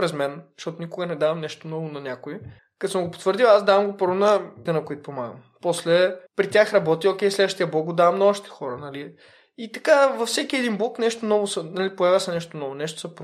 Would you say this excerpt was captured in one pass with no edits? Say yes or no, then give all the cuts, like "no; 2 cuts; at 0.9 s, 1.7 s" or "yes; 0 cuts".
no; 3 cuts; at 2.6 s, 4.7 s, 6.3 s